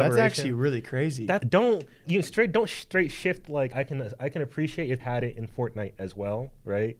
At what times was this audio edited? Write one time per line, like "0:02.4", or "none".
0:01.4
0:02.0
0:03.7
0:05.0